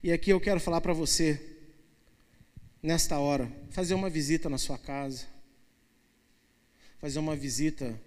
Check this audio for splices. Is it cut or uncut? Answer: uncut